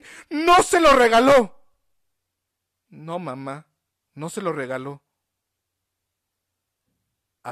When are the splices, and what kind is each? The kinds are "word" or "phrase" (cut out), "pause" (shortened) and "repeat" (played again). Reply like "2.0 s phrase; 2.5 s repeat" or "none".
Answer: none